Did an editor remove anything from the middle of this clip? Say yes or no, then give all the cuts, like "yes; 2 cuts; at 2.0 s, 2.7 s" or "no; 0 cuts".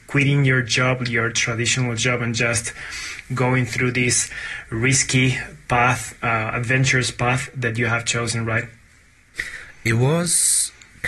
no; 0 cuts